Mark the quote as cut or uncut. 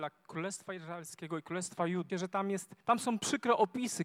cut